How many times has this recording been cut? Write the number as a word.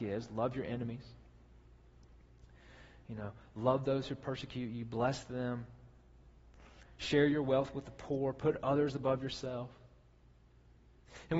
zero